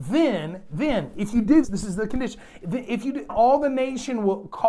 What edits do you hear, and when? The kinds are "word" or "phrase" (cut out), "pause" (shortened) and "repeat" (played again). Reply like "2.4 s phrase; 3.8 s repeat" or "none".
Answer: 1.6 s word; 3.3 s word